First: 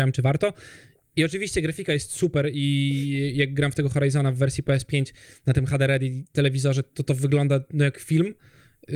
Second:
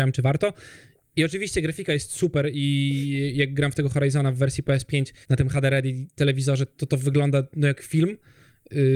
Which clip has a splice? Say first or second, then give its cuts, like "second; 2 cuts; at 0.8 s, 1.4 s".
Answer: second; 1 cut; at 5.2 s